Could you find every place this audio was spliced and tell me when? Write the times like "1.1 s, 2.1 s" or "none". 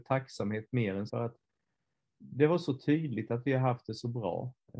1.1 s